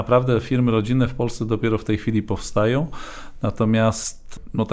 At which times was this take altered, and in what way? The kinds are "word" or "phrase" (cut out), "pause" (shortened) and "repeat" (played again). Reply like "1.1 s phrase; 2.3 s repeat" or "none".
none

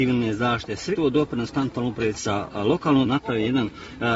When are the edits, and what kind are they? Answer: 0.9 s word; 2.2 s phrase; 3.0 s word

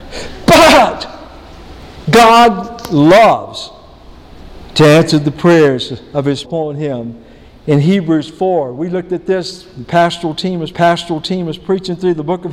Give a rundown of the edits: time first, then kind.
6.4 s phrase; 10.7 s repeat

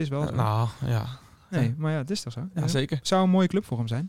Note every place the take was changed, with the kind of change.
none

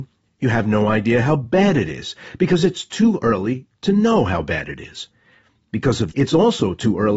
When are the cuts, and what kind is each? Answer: 6.1 s word

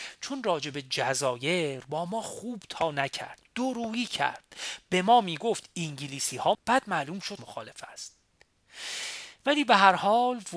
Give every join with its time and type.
6.5 s word; 7.4 s word

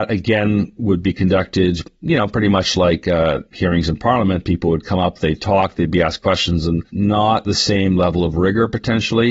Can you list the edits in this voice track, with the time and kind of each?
3.5 s pause; 6.9 s pause

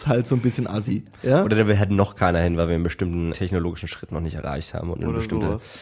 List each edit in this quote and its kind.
3.3 s word

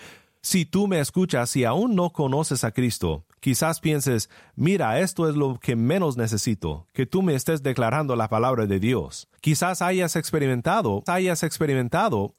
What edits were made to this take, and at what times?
9.4 s pause; 11.1 s repeat

